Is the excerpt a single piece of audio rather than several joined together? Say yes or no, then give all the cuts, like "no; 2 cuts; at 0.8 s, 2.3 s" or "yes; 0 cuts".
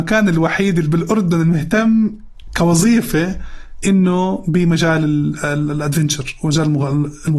yes; 0 cuts